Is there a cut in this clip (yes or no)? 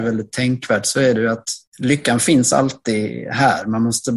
yes